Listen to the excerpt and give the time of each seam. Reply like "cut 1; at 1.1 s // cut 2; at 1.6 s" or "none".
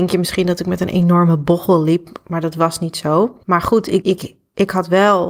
cut 1; at 3.4 s // cut 2; at 4.0 s

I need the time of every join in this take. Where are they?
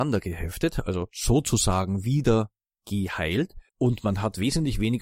cut 1; at 3.7 s

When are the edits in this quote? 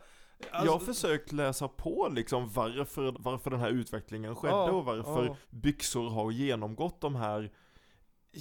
cut 1; at 3.1 s // cut 2; at 5.4 s

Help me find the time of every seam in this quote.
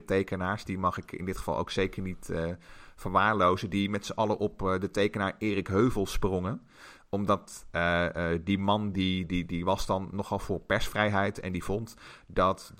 none

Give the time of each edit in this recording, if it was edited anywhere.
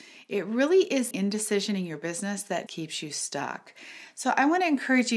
cut 1; at 1.1 s // cut 2; at 2.7 s

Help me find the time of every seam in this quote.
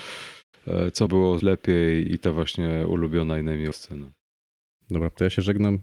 cut 1; at 1.1 s // cut 2; at 1.4 s // cut 3; at 2.1 s // cut 4; at 3.7 s

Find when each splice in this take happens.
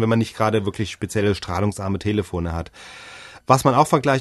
none

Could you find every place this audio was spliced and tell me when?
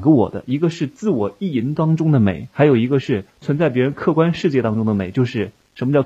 cut 1; at 3.3 s

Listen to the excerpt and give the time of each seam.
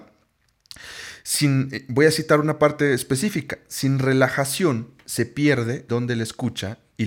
cut 1; at 5.9 s

